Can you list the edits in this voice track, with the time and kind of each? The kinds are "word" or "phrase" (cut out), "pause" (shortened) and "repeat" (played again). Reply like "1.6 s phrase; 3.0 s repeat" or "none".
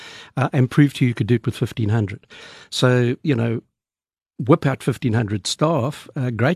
none